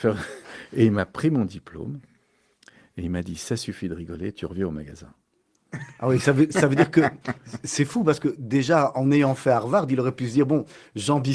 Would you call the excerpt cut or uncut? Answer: uncut